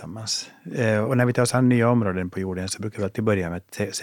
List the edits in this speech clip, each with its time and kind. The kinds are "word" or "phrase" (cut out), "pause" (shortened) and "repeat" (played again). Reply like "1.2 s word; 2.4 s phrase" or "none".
1.1 s word